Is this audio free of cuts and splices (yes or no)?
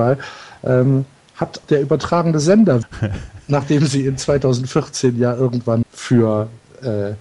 no